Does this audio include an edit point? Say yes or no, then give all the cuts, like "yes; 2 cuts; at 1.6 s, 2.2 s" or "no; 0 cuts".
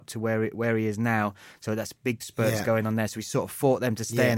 yes; 1 cut; at 2.2 s